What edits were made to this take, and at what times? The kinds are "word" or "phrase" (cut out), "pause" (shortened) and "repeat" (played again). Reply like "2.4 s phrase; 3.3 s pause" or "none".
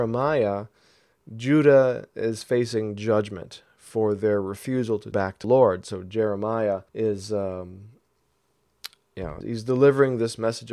5.1 s word; 5.4 s word; 6.9 s pause; 9.4 s word